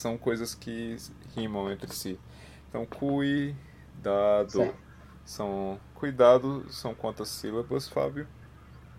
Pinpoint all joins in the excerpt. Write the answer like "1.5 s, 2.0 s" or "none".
none